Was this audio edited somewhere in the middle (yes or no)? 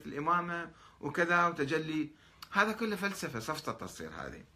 no